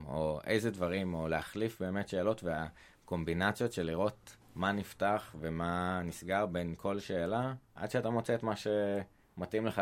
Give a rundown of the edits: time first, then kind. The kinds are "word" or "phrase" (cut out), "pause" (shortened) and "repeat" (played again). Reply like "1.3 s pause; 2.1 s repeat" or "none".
4.4 s pause; 7.6 s pause